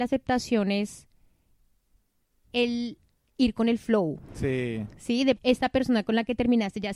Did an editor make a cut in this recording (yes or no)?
yes